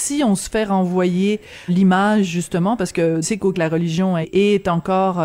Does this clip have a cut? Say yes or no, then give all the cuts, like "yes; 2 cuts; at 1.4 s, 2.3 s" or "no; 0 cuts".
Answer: yes; 4 cuts; at 1.7 s, 3.2 s, 3.5 s, 4.2 s